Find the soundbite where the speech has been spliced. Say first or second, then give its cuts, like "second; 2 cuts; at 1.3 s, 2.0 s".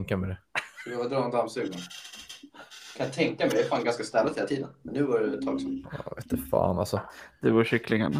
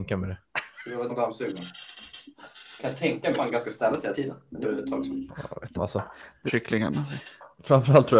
second; 5 cuts; at 1.1 s, 3.4 s, 4.6 s, 5.8 s, 6.5 s